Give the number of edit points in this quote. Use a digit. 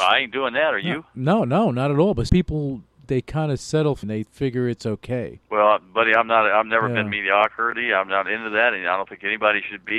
4